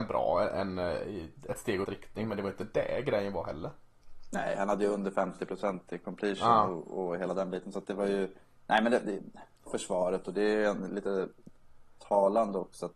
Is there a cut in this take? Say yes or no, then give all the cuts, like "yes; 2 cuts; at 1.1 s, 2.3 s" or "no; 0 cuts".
yes; 3 cuts; at 1.8 s, 8.4 s, 9.7 s